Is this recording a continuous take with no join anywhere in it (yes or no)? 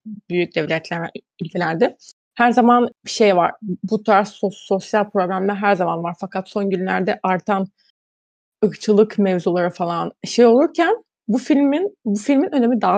no